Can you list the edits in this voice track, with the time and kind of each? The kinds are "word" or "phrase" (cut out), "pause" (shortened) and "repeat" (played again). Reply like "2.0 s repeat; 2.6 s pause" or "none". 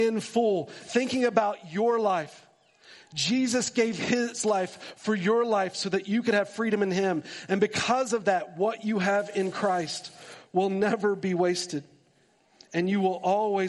none